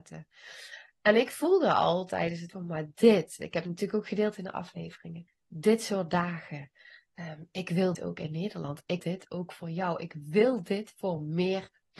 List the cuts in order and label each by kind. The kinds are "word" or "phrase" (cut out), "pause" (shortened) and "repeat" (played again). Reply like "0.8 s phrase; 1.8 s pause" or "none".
2.5 s word; 5.3 s word; 7.9 s word; 9.0 s word